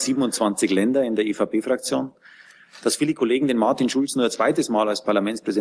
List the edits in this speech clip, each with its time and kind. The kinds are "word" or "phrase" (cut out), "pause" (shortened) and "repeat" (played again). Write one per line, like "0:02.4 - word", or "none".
none